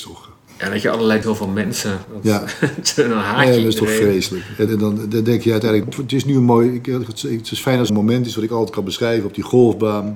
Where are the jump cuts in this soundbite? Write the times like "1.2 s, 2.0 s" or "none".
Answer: 1.2 s, 4.7 s, 5.8 s, 7.9 s

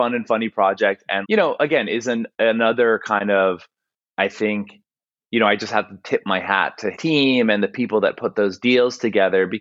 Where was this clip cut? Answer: 1.2 s, 6.9 s

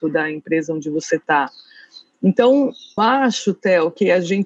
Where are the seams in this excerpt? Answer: 3.0 s

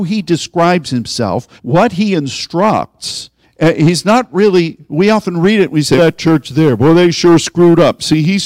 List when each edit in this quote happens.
1.6 s, 3.4 s, 6.0 s

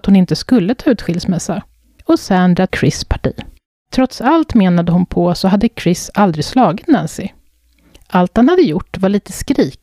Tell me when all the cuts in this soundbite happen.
2.7 s

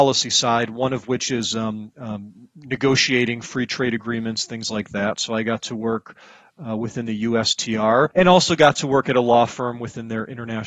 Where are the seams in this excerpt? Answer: 8.1 s

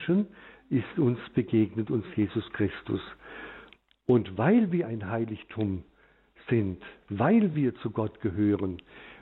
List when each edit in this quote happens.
none

